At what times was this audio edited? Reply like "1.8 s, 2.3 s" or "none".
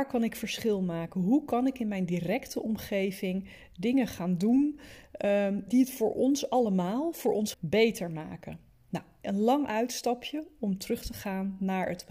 5.7 s, 7.5 s